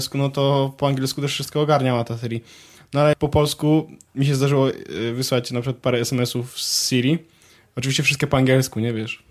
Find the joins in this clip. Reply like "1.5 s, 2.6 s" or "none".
3.1 s